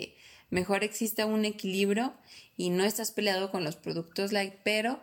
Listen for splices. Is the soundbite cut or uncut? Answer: uncut